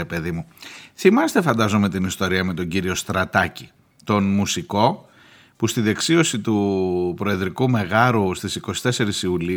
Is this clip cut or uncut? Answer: uncut